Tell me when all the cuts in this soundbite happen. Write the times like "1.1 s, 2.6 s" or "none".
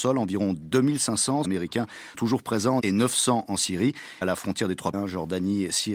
1.4 s, 2.1 s, 2.8 s, 4.2 s, 4.9 s